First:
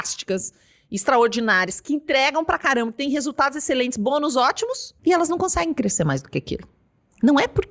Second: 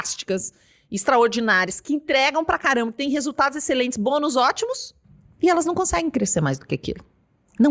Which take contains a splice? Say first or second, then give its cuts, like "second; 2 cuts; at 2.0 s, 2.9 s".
first; 1 cut; at 5.0 s